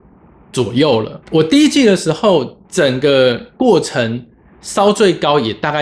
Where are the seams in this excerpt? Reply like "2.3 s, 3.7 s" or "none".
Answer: 1.2 s, 2.6 s